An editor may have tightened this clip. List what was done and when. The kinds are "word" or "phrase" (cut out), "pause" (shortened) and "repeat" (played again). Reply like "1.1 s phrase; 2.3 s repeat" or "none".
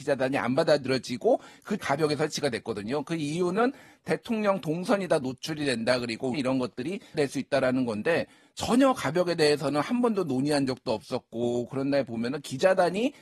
1.8 s word; 6.3 s word; 7.1 s word

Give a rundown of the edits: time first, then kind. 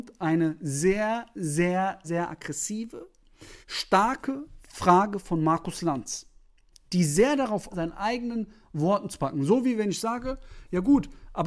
2.0 s word; 3.6 s pause; 7.7 s phrase

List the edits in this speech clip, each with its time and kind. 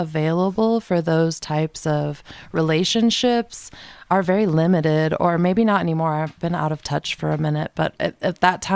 none

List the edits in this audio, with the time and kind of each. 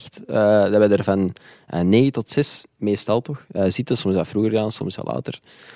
none

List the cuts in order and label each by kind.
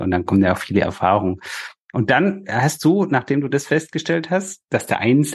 none

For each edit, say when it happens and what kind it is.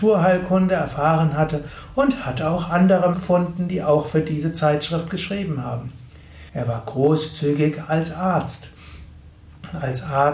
3.1 s word; 6.5 s pause

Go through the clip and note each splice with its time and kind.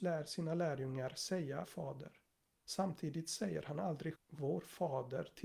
1.6 s word; 2.3 s pause; 4.2 s word

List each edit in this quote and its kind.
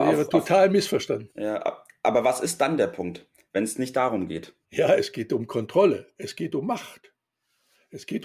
1.3 s pause; 4.6 s pause

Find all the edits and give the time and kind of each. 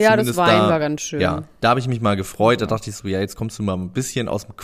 none

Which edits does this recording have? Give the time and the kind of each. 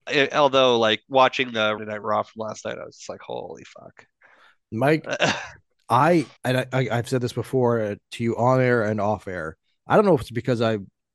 1.8 s phrase; 6.4 s pause

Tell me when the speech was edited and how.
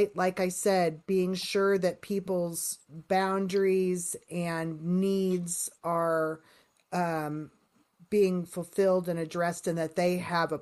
2.9 s word

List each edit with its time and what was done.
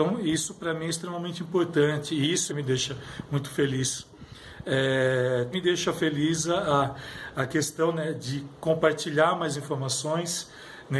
2.5 s phrase; 5.5 s word

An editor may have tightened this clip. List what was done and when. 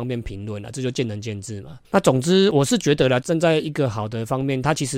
1.8 s pause

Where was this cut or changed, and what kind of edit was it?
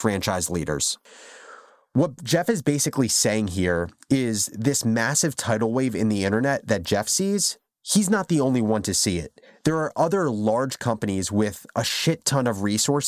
none

